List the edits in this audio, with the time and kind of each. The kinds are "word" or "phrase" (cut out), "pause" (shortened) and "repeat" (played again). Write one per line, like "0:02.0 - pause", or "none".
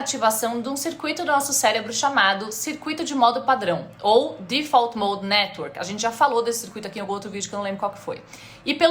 none